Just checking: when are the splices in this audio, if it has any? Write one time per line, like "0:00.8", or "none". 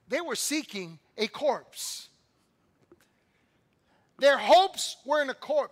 none